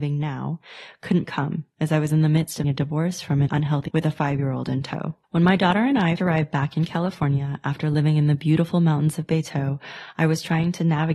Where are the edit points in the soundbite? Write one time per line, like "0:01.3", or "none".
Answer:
0:01.2
0:02.6
0:03.5
0:03.9
0:05.2
0:06.2